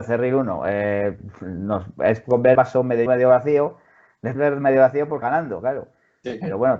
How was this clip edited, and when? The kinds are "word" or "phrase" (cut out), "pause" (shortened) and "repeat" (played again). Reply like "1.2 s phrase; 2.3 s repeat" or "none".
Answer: 2.5 s word; 3.1 s word; 4.3 s word; 5.2 s word